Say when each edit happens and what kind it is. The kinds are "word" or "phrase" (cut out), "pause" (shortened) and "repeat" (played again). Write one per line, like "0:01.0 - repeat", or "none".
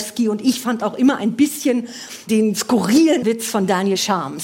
0:03.2 - word